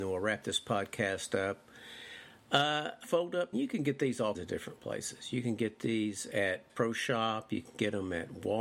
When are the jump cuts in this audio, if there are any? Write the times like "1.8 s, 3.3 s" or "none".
3.0 s, 3.5 s, 4.3 s, 6.7 s